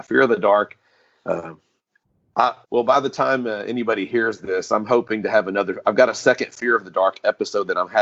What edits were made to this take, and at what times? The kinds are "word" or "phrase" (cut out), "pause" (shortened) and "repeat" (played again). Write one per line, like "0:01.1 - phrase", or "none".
0:02.6 - pause